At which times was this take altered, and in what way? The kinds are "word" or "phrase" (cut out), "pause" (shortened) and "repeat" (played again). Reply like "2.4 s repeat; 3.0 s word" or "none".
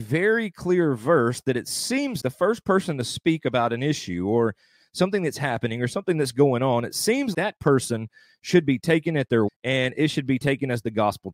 2.2 s word; 7.3 s word; 9.5 s word